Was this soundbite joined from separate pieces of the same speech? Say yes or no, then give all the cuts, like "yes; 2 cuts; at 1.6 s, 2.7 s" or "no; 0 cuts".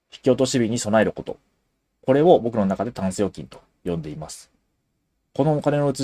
no; 0 cuts